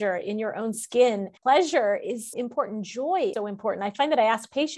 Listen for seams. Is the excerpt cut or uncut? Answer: cut